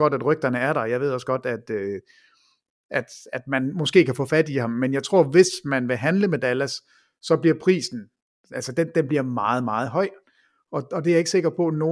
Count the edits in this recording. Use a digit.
0